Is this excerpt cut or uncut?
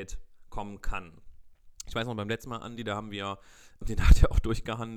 cut